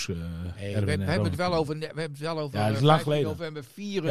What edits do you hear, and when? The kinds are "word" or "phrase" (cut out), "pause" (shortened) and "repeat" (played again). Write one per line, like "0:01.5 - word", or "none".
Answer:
none

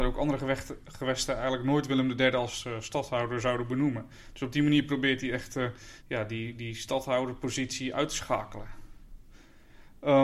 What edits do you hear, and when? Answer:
0:06.0 - pause

